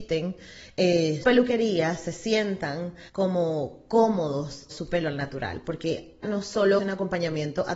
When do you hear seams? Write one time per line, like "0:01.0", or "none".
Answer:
0:01.2
0:03.1
0:04.7
0:06.2
0:06.8

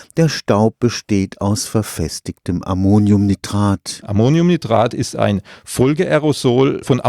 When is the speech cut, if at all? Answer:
none

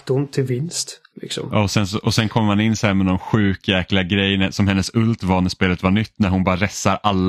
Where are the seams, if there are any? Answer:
none

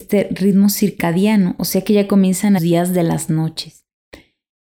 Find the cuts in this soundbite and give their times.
0:02.6

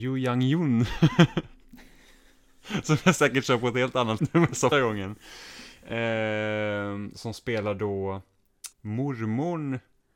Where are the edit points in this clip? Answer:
0:04.2
0:04.7
0:08.7

